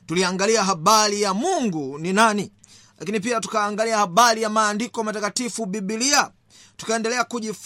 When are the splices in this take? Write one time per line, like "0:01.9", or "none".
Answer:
none